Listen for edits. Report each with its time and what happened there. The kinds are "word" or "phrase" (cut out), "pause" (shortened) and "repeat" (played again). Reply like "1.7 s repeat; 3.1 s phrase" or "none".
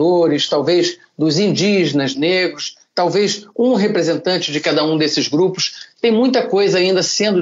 2.1 s phrase